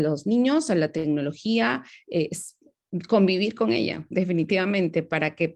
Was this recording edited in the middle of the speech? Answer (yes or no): no